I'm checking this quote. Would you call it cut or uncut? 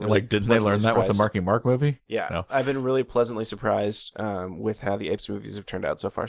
uncut